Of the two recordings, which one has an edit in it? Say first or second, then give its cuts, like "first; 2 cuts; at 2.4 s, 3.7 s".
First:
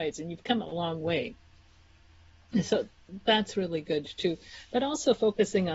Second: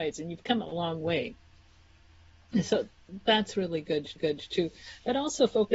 second; 1 cut; at 4.2 s